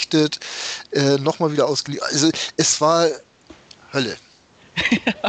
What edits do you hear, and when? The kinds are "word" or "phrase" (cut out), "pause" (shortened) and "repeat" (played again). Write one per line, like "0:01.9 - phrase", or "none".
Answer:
none